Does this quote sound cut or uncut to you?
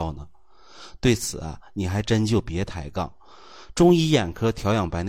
uncut